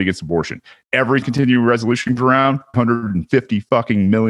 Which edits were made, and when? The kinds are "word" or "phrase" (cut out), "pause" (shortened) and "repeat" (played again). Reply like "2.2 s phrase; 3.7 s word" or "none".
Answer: 1.2 s word; 2.2 s word; 2.7 s word